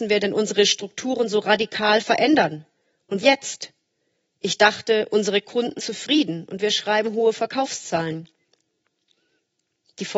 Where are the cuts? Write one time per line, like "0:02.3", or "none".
0:03.2
0:05.8